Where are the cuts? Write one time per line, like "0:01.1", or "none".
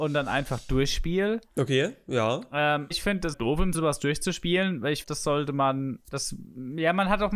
0:02.9
0:03.3
0:03.7
0:05.0